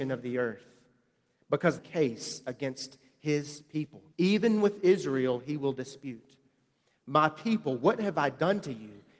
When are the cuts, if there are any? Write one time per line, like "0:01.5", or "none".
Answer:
0:01.8
0:04.1